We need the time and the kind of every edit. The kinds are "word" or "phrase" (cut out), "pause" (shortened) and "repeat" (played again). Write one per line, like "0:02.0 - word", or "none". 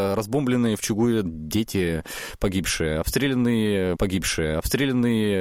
0:01.2 - phrase
0:03.9 - repeat